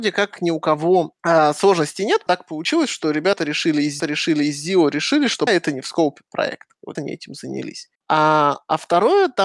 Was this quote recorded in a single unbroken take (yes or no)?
no